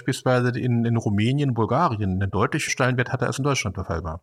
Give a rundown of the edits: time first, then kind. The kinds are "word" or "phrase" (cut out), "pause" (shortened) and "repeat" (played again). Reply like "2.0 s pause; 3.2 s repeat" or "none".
2.7 s word